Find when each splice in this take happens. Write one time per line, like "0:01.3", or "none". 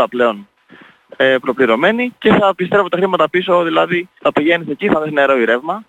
0:04.2
0:04.9